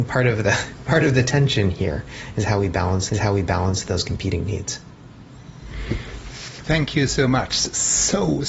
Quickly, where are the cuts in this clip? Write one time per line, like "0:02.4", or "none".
0:03.1